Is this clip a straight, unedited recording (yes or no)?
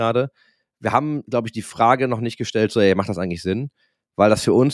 yes